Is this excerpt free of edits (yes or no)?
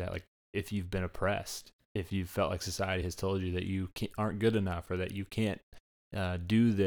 yes